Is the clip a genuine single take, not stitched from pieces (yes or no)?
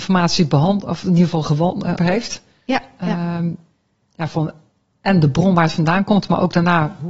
no